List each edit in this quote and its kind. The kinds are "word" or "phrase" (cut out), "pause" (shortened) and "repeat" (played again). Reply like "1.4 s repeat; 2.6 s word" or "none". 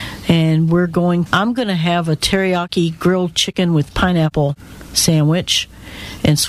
1.3 s phrase